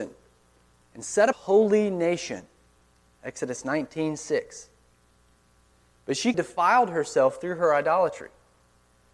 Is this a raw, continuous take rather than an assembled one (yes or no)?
no